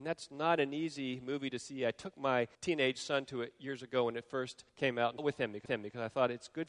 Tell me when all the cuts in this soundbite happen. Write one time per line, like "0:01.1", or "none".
0:02.5
0:04.7
0:05.2
0:05.7